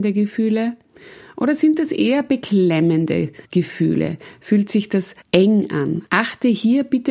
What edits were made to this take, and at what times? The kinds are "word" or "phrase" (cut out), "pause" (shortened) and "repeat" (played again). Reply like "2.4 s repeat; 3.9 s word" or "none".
3.4 s pause; 5.2 s pause; 6.1 s pause